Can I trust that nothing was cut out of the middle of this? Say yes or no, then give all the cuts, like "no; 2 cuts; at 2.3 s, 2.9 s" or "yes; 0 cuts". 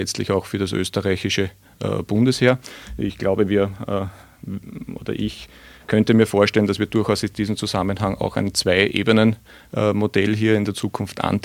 yes; 0 cuts